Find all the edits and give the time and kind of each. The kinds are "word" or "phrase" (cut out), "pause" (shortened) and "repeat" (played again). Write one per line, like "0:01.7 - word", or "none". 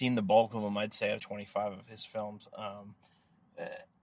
0:01.2 - word